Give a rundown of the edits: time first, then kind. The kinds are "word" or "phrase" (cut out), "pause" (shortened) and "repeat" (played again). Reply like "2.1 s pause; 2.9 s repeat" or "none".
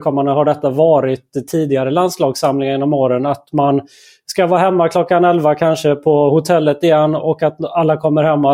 none